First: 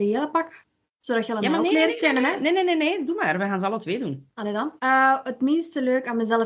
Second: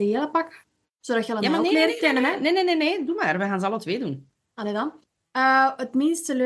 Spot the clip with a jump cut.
first; 2 cuts; at 4.3 s, 4.8 s

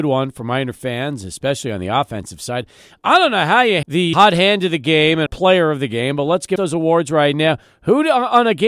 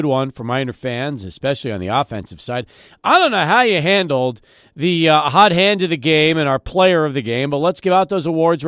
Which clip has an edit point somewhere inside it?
first; 4 cuts; at 3.8 s, 4.1 s, 5.3 s, 6.6 s

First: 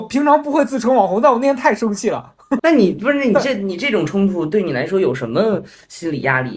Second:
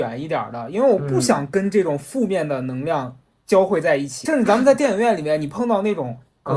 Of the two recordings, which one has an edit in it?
first; 1 cut; at 2.6 s

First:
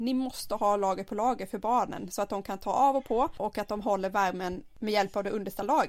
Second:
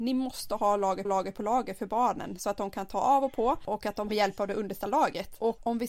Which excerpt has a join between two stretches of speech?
second; 2 cuts; at 1.0 s, 4.1 s

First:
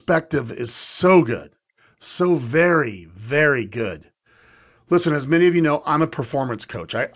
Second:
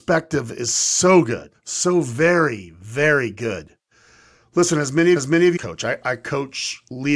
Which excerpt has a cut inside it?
second; 3 cuts; at 1.5 s, 5.2 s, 5.6 s

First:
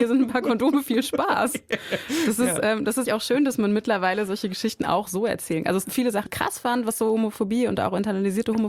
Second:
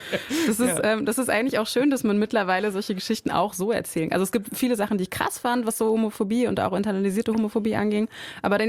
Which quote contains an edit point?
first; 3 cuts; at 3.0 s, 5.8 s, 6.3 s

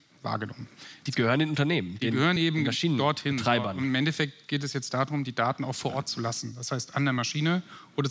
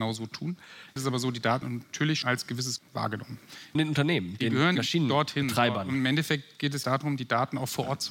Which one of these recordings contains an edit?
second; 7 cuts; at 1.0 s, 1.6 s, 2.2 s, 2.8 s, 3.7 s, 4.7 s, 6.8 s

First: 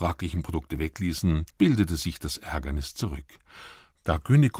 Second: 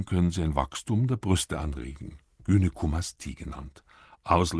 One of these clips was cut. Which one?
first; 1 cut; at 1.5 s

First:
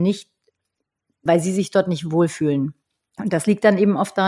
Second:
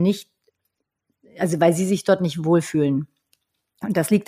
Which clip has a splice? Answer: first; 2 cuts; at 1.3 s, 2.8 s

